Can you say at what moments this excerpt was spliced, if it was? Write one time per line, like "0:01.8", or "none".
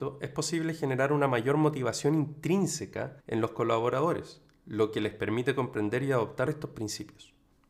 0:03.2
0:06.5